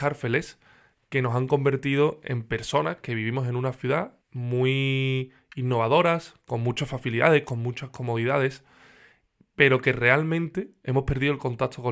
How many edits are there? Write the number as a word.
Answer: one